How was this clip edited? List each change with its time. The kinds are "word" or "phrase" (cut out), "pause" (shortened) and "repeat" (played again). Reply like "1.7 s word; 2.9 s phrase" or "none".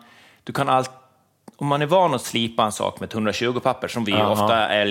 none